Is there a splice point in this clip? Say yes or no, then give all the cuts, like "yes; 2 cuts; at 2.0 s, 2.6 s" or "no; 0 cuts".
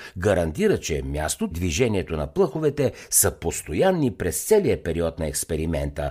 yes; 1 cut; at 1.5 s